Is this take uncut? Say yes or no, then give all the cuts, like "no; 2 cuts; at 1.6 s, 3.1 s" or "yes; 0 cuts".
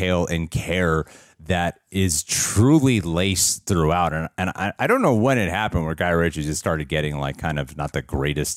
yes; 0 cuts